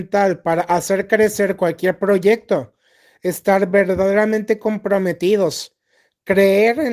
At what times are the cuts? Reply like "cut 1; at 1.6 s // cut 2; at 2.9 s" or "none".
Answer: none